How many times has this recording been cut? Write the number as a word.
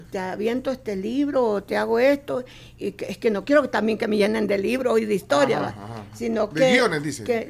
one